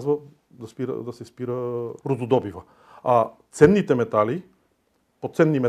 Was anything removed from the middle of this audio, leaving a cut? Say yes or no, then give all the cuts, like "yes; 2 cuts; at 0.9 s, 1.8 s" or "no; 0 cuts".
yes; 1 cut; at 2.0 s